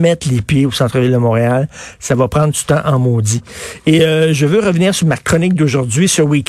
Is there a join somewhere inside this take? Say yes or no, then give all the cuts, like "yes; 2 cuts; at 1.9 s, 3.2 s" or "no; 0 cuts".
no; 0 cuts